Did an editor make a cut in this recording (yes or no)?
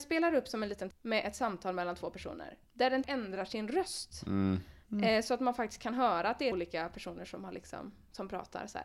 yes